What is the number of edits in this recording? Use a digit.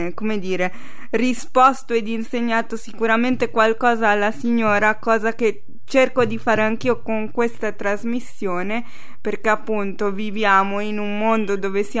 0